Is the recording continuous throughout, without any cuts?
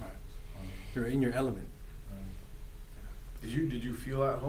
yes; 0 cuts

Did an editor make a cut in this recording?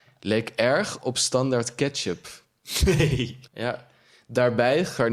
yes; 1 cut; at 3.5 s

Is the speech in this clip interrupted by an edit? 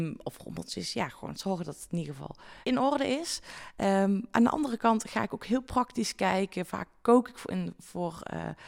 yes; 1 cut; at 2.6 s

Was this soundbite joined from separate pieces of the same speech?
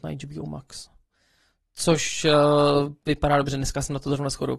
no; 0 cuts

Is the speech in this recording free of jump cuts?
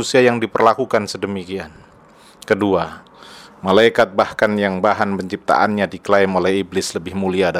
yes; 0 cuts

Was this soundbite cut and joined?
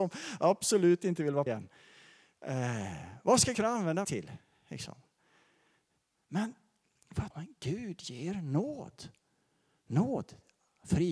yes; 4 cuts; at 1.5 s, 3.5 s, 4.0 s, 7.3 s

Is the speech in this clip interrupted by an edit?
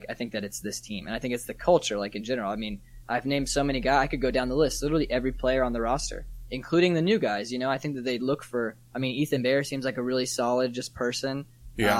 no; 0 cuts

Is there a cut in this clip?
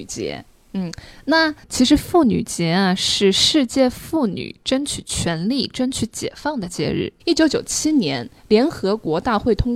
yes; 2 cuts; at 1.6 s, 7.2 s

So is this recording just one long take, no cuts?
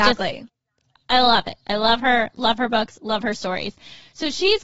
yes; 0 cuts

